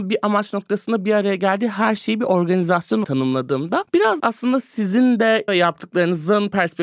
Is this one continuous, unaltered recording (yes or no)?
no